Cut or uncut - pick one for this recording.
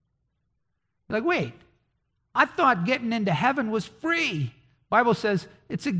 uncut